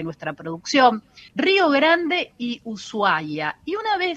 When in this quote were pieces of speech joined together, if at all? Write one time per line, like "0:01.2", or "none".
0:01.3